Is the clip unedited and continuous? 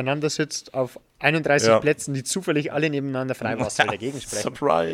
yes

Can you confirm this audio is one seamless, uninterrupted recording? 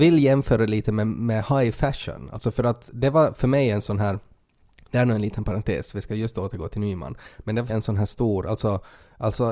no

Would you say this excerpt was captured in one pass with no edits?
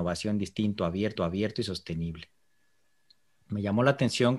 no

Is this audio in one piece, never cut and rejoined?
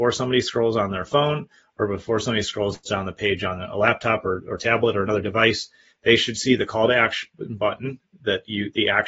yes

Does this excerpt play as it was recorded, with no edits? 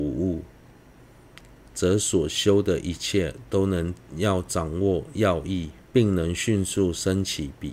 no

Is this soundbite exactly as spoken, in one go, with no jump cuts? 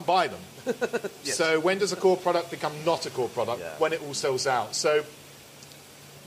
yes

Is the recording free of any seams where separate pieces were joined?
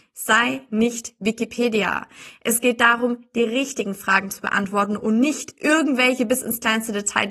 yes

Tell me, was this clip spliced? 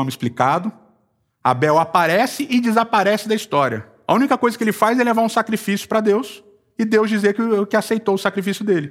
no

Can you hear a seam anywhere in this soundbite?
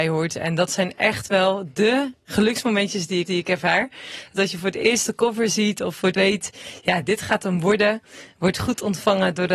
yes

